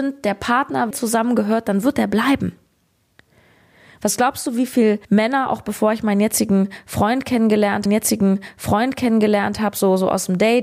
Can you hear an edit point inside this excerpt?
yes; 3 cuts; at 0.9 s, 5.0 s, 7.9 s

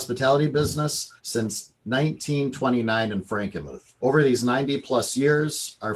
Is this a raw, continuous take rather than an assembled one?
no; 2 cuts; at 1.2 s, 4.0 s

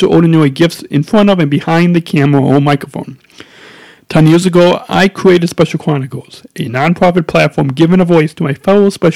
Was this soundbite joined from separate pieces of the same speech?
no; 0 cuts

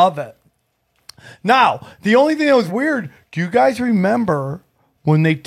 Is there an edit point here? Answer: yes; 1 cut; at 2.7 s

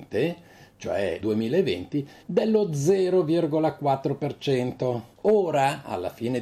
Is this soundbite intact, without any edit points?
no; 3 cuts; at 1.2 s, 2.2 s, 5.1 s

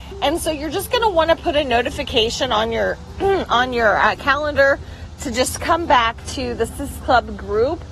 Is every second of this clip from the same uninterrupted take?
yes; 0 cuts

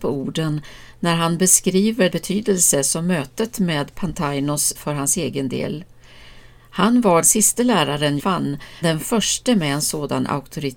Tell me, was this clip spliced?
yes; 5 cuts; at 2.1 s, 4.7 s, 7.2 s, 8.2 s, 8.8 s

